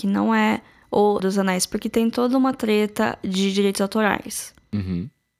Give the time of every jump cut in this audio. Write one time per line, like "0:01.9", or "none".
0:01.2